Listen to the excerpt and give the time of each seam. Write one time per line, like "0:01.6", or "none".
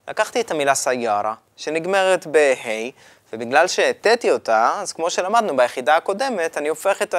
none